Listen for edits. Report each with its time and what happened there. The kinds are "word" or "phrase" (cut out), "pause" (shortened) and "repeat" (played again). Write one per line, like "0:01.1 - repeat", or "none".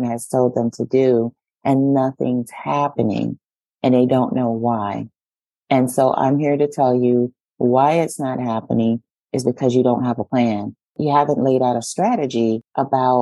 none